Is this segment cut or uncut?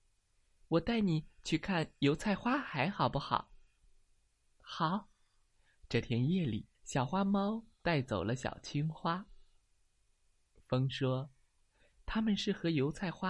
cut